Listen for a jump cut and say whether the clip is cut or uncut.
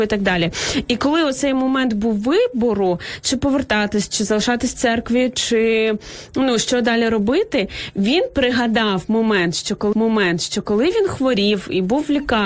cut